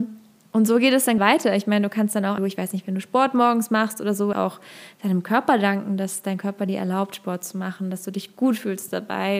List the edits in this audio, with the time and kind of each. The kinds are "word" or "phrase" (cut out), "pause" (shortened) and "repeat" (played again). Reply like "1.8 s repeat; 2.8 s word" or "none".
1.2 s word; 2.4 s phrase; 4.3 s word